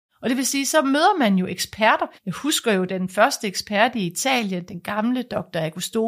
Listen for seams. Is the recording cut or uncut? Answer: cut